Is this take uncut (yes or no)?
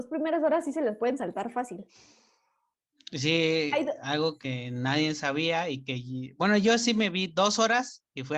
yes